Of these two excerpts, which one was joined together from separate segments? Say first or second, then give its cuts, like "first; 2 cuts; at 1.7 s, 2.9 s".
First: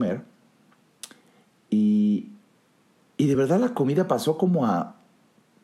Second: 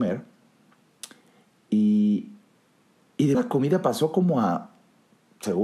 second; 1 cut; at 3.3 s